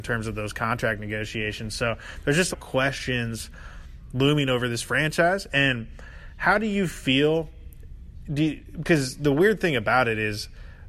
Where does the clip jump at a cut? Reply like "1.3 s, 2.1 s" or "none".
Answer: 2.5 s